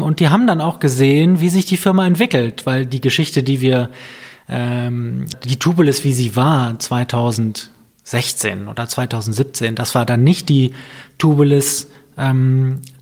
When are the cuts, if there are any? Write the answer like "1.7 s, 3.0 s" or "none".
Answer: 5.3 s